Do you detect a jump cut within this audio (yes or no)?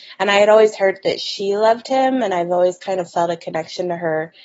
no